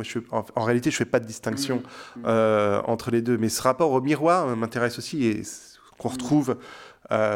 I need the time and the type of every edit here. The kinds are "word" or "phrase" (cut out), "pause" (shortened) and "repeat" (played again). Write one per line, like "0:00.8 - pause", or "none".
none

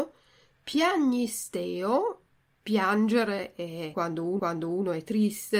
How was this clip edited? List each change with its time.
0:04.4 - repeat

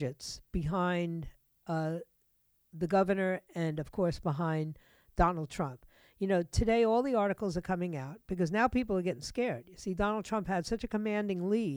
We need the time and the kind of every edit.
none

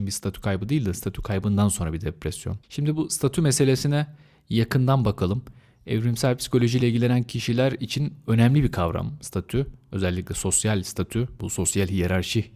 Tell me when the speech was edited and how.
none

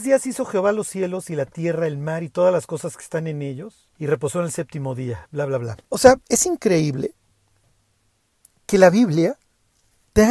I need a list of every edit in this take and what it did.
0:03.9 - pause
0:05.8 - pause
0:06.2 - pause

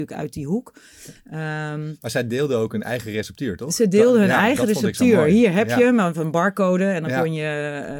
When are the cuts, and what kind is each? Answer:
none

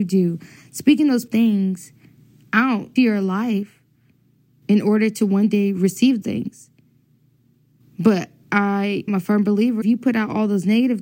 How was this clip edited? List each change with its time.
0:01.3 - word
0:03.0 - word
0:06.2 - word
0:09.1 - word
0:09.8 - word

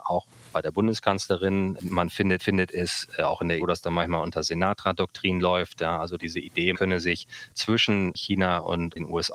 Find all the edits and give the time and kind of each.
0:02.4 - repeat
0:03.6 - word
0:06.7 - word

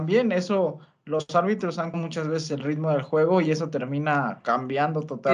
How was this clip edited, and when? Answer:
0:01.9 - word

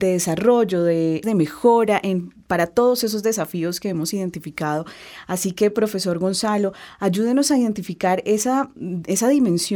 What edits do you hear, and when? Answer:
0:01.2 - word

